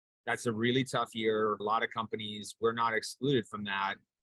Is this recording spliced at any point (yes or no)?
yes